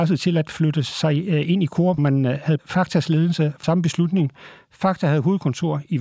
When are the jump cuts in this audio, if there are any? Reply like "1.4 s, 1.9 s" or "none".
2.0 s, 2.6 s, 3.6 s